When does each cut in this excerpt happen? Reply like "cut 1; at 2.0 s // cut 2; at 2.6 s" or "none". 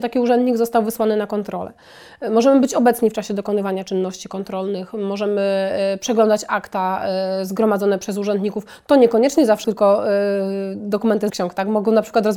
cut 1; at 9.6 s // cut 2; at 11.3 s